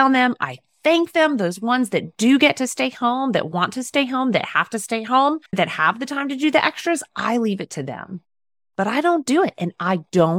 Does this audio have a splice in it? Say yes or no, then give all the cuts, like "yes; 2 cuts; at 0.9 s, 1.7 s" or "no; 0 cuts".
yes; 1 cut; at 5.5 s